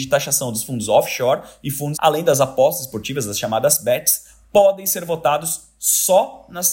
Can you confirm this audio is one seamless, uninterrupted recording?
no; 1 cut; at 1.9 s

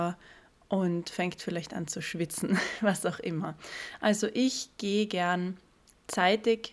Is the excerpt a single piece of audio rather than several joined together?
yes; 0 cuts

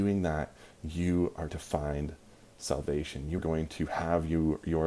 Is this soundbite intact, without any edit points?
no; 2 cuts; at 1.5 s, 3.4 s

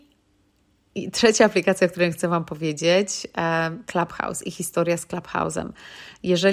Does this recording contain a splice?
no; 0 cuts

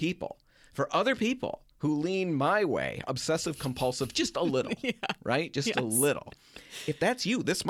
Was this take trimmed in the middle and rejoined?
yes; 1 cut; at 1.7 s

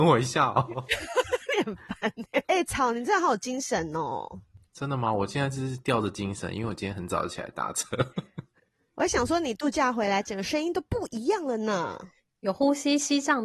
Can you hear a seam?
yes; 1 cut; at 2.4 s

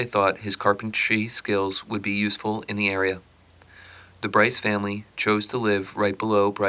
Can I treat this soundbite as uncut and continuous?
yes; 0 cuts

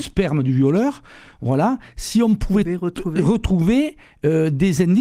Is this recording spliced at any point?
no; 0 cuts

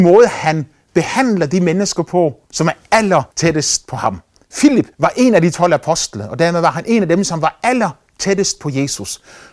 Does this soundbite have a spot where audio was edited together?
yes; 3 cuts; at 2.4 s, 3.3 s, 4.9 s

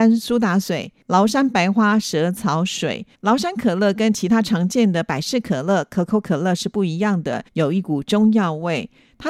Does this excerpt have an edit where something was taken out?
yes; 3 cuts; at 1.0 s, 3.1 s, 7.5 s

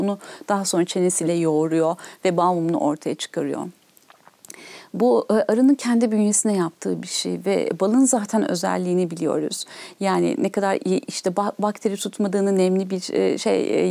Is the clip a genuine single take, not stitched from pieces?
yes; 0 cuts

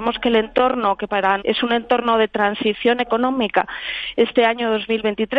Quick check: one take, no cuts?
no; 1 cut; at 1.4 s

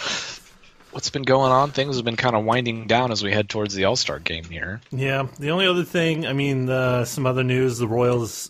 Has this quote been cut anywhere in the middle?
no; 0 cuts

